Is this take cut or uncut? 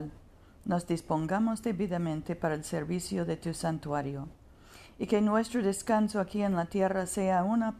uncut